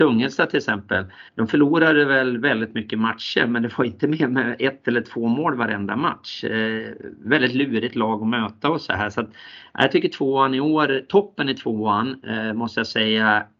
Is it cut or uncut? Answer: cut